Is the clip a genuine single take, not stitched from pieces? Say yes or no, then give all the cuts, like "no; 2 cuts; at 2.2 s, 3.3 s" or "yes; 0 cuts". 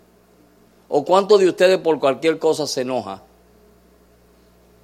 yes; 0 cuts